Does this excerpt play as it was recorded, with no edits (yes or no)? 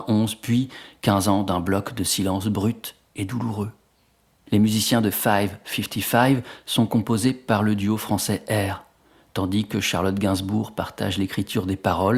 yes